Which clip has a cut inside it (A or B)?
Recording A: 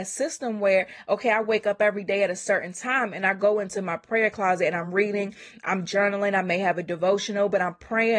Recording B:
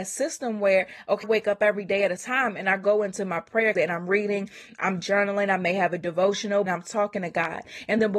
B